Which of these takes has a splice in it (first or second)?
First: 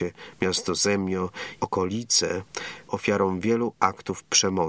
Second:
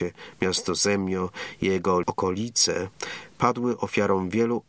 first